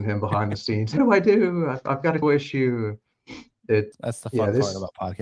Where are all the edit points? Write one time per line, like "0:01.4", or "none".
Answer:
0:01.0
0:02.2
0:03.9